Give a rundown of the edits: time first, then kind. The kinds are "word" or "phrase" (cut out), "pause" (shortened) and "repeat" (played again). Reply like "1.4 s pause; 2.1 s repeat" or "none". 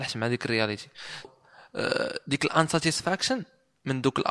1.2 s word